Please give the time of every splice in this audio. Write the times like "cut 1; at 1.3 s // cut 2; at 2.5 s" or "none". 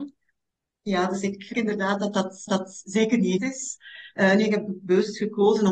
cut 1; at 1.5 s // cut 2; at 2.5 s // cut 3; at 3.4 s